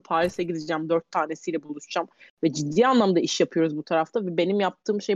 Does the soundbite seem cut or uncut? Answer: uncut